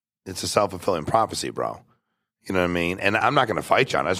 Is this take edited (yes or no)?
no